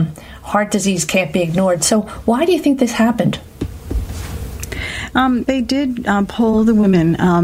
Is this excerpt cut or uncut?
cut